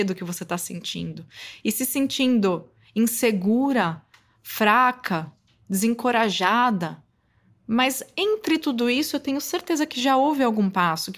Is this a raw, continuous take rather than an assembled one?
yes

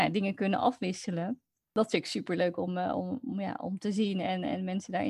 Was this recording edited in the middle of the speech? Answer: no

